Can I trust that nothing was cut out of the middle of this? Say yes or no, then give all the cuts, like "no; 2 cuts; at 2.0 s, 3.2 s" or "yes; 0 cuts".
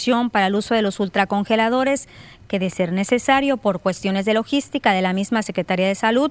yes; 0 cuts